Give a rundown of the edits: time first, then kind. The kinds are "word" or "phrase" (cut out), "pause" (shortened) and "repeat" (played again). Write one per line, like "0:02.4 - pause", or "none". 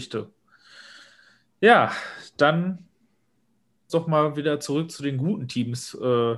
0:03.9 - phrase